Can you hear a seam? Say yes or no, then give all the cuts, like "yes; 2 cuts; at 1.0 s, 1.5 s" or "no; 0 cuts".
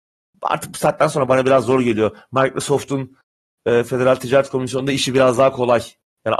no; 0 cuts